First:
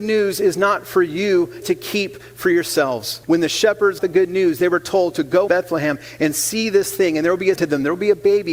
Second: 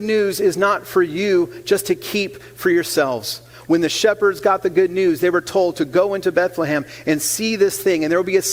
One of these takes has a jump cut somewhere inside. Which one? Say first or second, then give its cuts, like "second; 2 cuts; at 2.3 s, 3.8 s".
first; 5 cuts; at 1.6 s, 3.2 s, 4.0 s, 5.5 s, 7.6 s